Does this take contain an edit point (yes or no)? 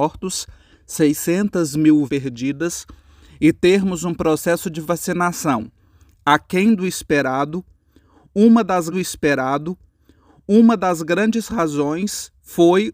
yes